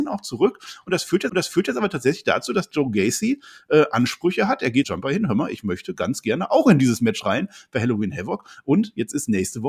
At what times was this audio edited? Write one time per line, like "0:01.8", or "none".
0:01.3
0:04.8